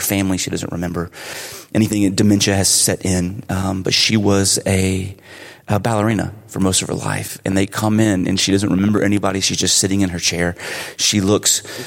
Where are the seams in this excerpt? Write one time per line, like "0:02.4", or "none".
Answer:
none

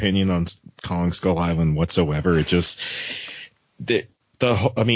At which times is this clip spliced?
none

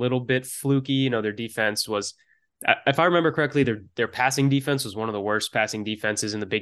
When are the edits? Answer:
none

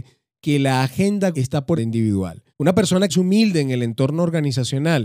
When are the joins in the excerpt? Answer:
0:01.3
0:01.8
0:02.5
0:03.1

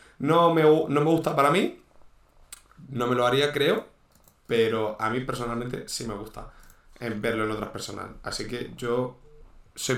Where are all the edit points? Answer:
none

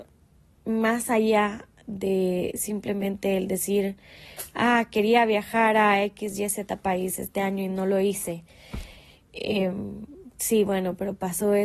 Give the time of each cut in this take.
none

